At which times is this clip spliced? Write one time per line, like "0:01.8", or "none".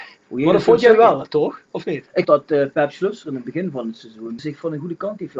0:02.2